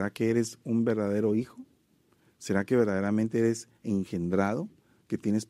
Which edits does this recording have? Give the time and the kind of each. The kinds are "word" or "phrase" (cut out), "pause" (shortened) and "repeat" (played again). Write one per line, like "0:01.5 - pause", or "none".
none